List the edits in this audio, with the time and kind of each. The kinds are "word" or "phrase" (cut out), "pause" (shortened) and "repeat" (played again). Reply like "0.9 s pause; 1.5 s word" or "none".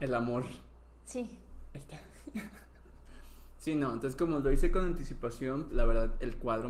5.7 s word